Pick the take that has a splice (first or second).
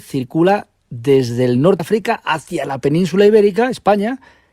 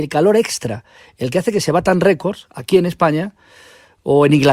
first